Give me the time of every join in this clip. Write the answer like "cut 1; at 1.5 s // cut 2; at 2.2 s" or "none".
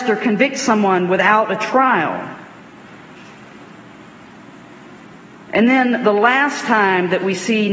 none